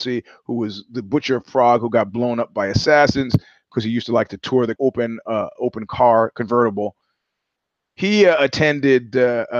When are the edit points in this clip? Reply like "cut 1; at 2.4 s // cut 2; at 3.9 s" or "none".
cut 1; at 4.8 s